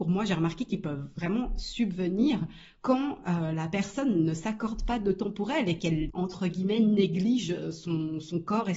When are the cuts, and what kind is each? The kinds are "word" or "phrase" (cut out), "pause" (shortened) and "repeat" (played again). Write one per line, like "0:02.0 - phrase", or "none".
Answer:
none